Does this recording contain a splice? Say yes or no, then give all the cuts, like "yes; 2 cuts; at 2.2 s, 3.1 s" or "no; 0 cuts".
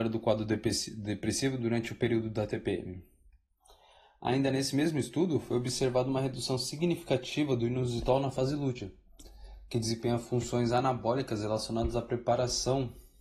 no; 0 cuts